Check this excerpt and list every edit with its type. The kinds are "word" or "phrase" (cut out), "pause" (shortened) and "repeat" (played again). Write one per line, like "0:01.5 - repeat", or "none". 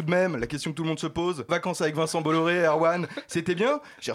0:01.5 - word